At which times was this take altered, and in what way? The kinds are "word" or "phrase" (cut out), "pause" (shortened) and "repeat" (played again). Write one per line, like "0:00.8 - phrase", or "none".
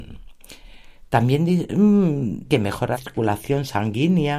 0:02.4 - word
0:02.9 - word